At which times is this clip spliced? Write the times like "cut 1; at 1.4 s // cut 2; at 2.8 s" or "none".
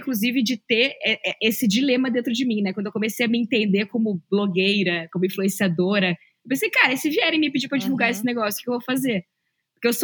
none